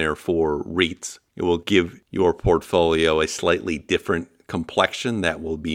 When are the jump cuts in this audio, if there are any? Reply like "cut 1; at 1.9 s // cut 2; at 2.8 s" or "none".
cut 1; at 1.3 s